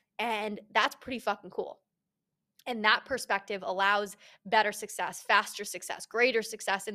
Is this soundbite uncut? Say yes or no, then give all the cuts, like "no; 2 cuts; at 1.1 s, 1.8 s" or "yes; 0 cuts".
yes; 0 cuts